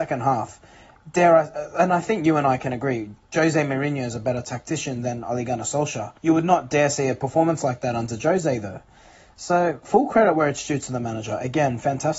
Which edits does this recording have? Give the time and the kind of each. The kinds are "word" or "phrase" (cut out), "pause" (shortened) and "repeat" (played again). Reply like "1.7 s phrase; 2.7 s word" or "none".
6.2 s pause